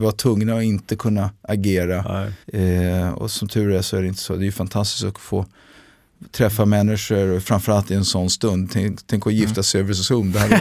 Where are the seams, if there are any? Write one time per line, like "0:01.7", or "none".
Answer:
0:02.4

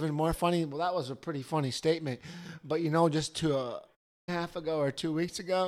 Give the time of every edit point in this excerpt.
0:04.3

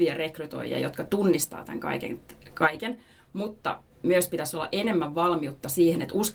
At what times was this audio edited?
0:03.9

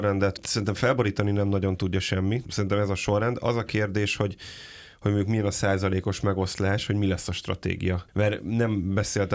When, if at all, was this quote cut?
none

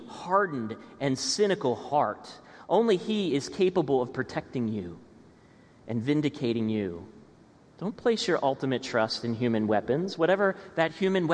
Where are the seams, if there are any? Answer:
none

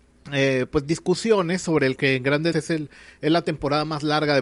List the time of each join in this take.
0:02.0
0:02.5

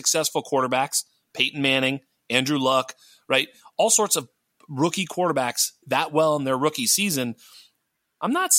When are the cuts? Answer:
0:05.8

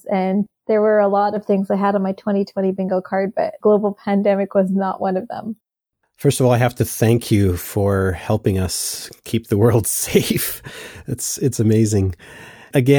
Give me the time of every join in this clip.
none

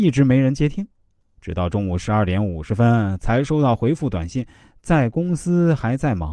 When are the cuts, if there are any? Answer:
none

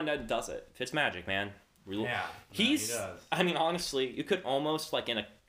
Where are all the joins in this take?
none

